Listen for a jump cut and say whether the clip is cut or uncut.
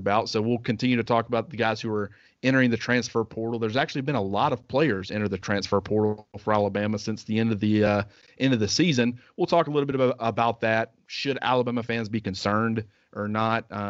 uncut